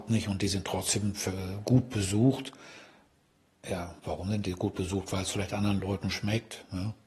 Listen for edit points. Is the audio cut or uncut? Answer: uncut